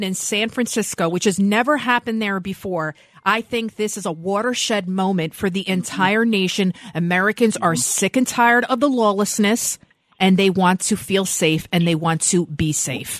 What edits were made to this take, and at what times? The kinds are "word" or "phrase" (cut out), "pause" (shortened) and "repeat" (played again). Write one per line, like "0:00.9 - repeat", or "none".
none